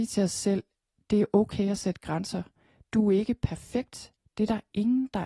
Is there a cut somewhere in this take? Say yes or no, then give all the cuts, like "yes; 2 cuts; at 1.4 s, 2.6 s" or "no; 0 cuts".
no; 0 cuts